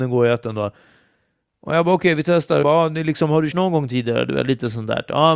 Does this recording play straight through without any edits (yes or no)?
no